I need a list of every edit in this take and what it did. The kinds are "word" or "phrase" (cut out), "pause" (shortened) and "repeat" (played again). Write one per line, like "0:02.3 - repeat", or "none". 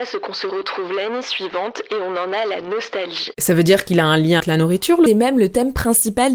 0:04.4 - word
0:05.1 - phrase